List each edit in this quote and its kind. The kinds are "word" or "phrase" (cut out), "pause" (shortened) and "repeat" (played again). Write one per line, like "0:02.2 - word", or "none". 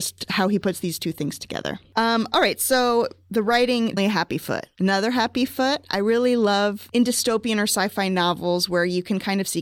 0:04.0 - word